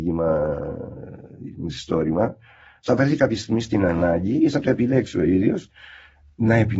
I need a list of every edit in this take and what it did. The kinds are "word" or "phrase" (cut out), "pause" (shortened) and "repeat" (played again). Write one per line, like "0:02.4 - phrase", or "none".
none